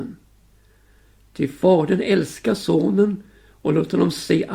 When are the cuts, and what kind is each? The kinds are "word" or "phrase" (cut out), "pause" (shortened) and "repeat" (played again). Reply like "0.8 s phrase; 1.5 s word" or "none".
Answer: none